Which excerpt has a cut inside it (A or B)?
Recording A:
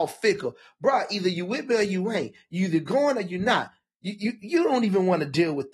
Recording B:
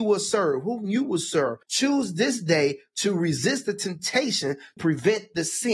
B